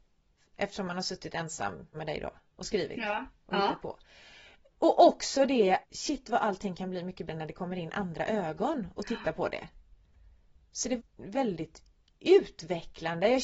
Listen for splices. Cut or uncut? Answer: cut